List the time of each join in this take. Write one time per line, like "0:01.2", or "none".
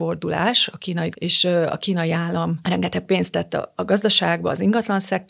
0:01.1

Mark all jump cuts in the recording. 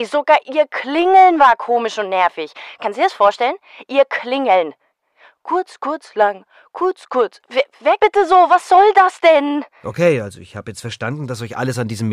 0:08.0

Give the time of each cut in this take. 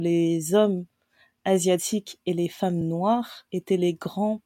none

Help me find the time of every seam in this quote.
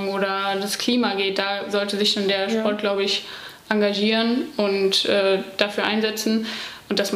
none

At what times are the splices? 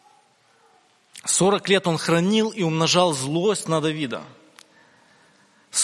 none

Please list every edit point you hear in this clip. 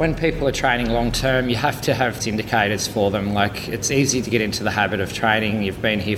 0:02.2
0:04.2

